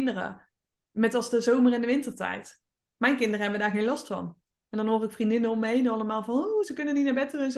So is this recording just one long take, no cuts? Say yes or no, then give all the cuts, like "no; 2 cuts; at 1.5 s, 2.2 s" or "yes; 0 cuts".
yes; 0 cuts